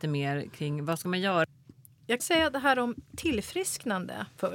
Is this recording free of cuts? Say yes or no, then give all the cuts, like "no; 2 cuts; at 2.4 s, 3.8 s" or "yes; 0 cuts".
no; 1 cut; at 2.2 s